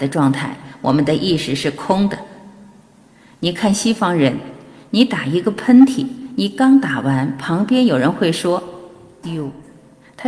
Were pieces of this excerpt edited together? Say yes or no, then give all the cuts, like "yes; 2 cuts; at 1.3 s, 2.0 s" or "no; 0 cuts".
yes; 1 cut; at 9.2 s